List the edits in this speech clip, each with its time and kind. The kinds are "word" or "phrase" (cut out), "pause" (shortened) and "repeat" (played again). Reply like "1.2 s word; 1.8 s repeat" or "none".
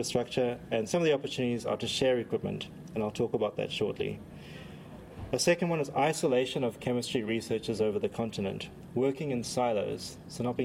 none